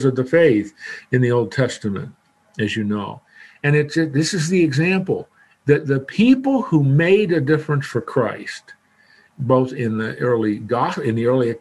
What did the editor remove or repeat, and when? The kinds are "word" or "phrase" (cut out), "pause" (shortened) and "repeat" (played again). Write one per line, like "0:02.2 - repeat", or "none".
none